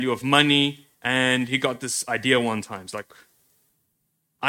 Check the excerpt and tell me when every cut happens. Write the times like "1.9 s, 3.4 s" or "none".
0.9 s